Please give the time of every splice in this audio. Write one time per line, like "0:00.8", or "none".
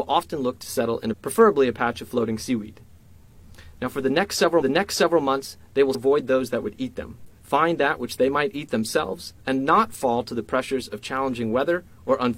0:01.1
0:04.6
0:05.9
0:07.4
0:09.4